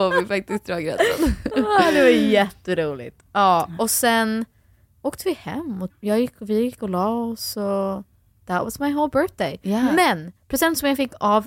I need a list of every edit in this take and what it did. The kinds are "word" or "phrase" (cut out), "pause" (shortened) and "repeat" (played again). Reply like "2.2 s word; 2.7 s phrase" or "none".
5.9 s word